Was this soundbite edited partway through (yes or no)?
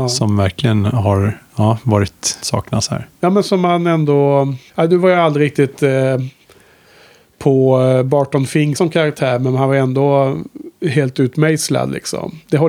yes